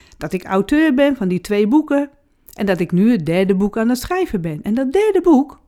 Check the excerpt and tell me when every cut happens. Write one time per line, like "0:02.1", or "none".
none